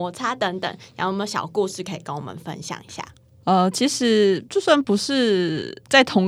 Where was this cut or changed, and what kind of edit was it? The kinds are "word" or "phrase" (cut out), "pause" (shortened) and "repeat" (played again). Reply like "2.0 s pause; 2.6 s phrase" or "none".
none